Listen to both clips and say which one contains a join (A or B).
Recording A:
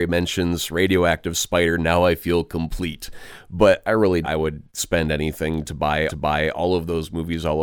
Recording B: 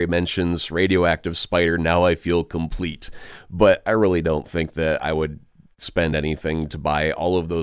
A